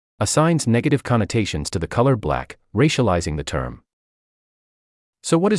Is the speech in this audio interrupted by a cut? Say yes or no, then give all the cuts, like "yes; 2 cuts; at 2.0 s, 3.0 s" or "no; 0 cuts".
no; 0 cuts